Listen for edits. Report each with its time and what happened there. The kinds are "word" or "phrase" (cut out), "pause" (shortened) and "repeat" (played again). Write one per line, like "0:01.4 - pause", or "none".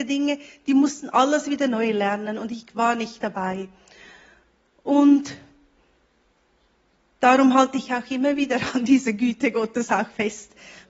none

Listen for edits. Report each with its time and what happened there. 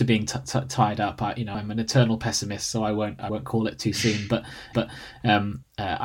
0:04.7 - repeat

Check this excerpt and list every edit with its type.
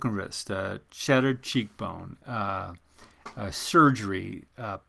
none

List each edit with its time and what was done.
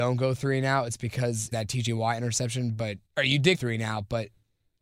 0:01.5 - phrase
0:03.1 - pause
0:03.5 - word

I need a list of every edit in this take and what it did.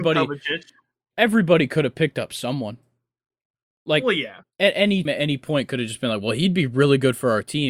0:05.1 - word

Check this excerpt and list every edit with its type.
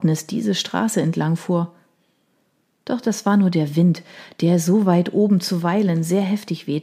none

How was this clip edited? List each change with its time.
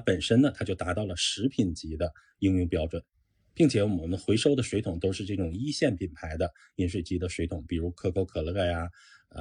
none

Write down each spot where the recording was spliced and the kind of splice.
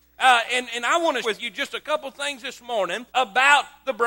0:01.2 - word
0:03.1 - pause

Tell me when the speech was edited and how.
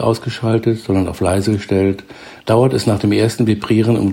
0:02.4 - pause

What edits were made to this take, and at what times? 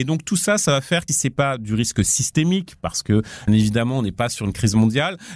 0:01.1 - phrase
0:03.5 - word

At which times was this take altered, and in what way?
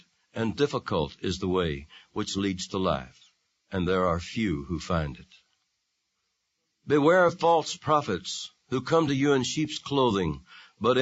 none

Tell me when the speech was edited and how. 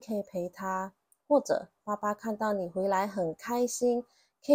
none

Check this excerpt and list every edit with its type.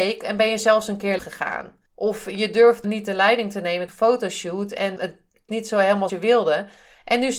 0:01.2 - word
0:01.9 - pause
0:02.8 - word
0:03.9 - word
0:05.0 - word
0:05.5 - phrase
0:06.1 - word

